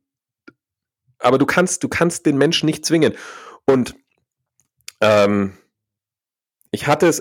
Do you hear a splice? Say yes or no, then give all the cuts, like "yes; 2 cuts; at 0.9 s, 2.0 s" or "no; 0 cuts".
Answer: no; 0 cuts